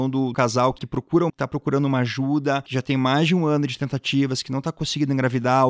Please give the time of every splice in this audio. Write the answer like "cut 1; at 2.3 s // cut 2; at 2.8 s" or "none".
cut 1; at 1.3 s

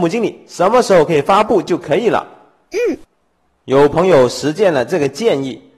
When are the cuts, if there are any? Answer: none

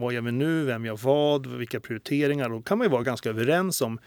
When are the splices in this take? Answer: none

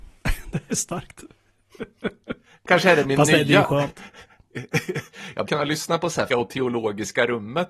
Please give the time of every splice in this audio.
cut 1; at 5.5 s // cut 2; at 6.3 s

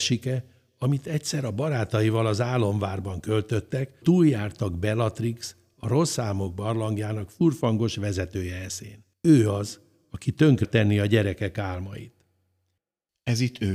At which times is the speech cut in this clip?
cut 1; at 4.0 s // cut 2; at 9.1 s // cut 3; at 10.6 s

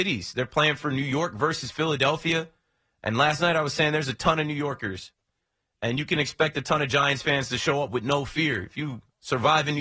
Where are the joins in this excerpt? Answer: none

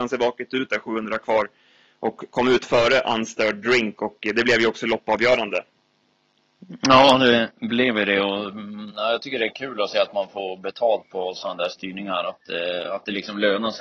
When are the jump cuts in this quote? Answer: none

